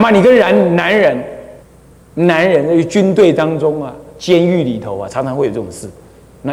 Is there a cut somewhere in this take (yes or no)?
yes